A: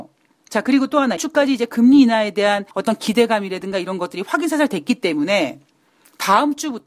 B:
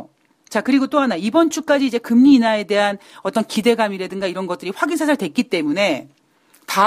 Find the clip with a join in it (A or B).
A